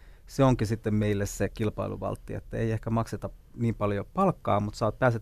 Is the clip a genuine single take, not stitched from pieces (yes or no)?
yes